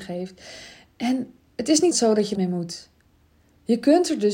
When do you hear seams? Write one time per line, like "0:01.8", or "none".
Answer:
0:01.9
0:02.3